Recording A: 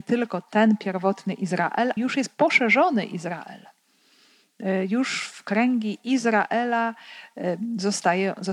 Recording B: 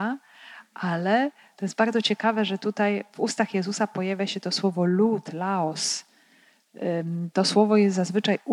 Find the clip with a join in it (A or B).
A